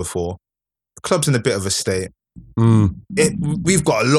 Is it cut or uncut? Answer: cut